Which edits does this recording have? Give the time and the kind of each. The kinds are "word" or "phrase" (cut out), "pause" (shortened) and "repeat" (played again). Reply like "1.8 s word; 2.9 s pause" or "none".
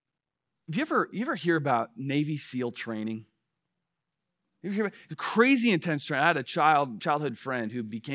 7.0 s word